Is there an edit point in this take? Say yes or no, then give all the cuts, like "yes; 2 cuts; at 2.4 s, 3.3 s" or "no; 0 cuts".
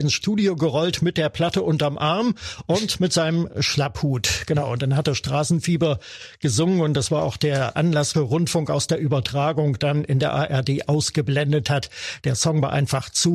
yes; 2 cuts; at 7.7 s, 8.1 s